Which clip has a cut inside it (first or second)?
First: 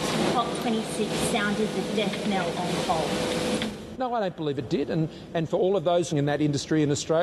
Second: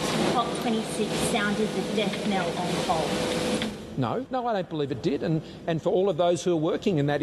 first